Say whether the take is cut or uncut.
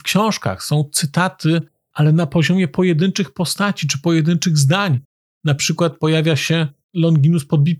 uncut